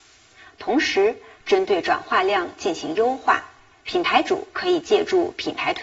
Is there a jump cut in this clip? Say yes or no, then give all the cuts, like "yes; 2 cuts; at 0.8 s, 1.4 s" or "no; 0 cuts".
yes; 1 cut; at 3.7 s